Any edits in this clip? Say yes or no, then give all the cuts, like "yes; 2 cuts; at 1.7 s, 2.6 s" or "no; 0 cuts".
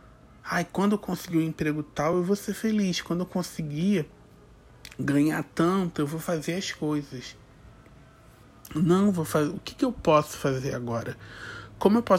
no; 0 cuts